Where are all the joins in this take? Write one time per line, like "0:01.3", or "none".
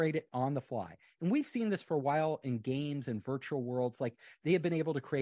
none